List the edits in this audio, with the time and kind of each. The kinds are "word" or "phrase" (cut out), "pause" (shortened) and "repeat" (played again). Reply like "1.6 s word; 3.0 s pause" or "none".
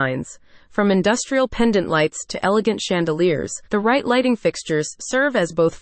3.6 s pause

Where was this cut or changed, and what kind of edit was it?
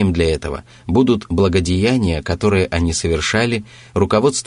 none

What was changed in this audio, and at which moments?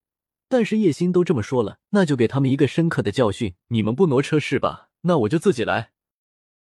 1.8 s pause; 3.6 s pause; 5.0 s pause

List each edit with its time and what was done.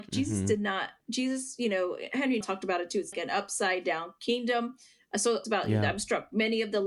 1.0 s pause; 2.4 s word; 3.1 s word; 5.4 s phrase

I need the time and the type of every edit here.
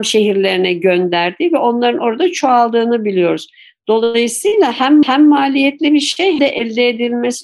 5.0 s repeat; 6.4 s word

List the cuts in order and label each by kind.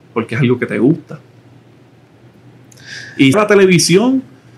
3.3 s word

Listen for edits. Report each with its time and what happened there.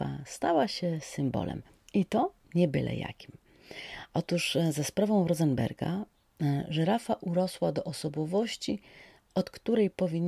none

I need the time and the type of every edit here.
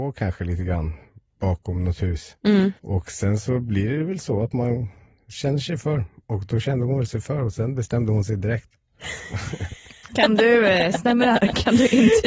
2.8 s pause

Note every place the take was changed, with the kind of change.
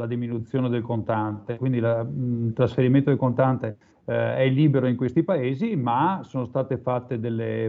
3.9 s pause

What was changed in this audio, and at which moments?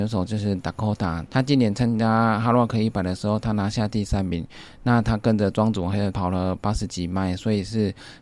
6.1 s word

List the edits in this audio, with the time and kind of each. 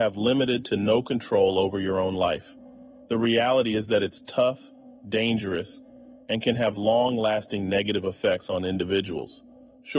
none

